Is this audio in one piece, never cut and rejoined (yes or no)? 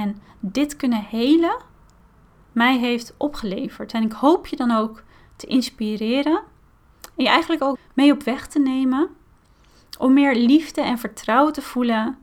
no